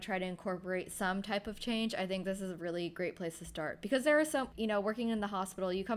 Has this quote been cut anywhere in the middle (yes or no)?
yes